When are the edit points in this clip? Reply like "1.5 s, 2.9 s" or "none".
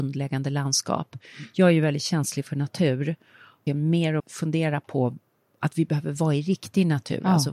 3.7 s, 4.2 s